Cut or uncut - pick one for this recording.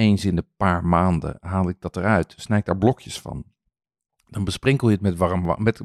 uncut